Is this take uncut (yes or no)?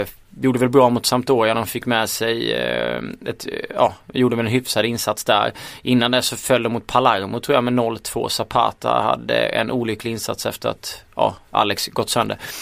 yes